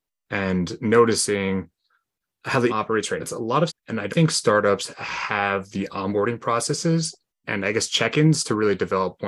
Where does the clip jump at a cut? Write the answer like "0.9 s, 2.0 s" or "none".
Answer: 2.7 s, 3.2 s, 3.7 s, 4.1 s, 7.4 s